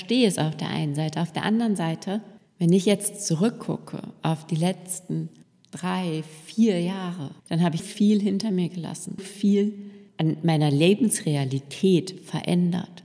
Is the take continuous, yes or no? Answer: no